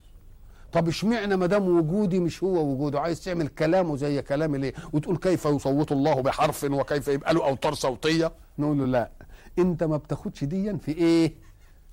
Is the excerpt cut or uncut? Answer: uncut